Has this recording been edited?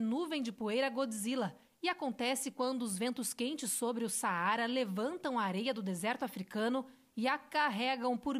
no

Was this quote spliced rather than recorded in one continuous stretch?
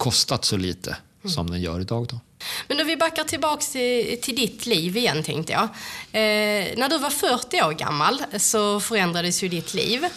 no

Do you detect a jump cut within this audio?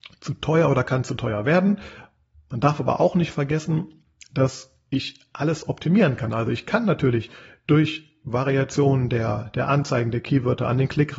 no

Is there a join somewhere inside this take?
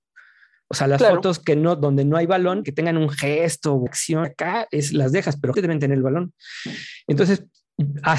yes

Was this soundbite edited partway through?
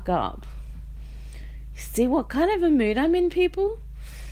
no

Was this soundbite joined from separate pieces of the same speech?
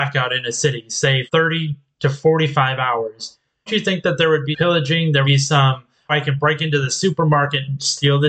yes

